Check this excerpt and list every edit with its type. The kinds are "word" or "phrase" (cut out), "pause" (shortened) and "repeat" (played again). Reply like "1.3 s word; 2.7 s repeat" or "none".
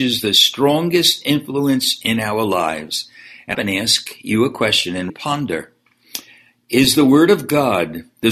3.5 s phrase; 5.1 s word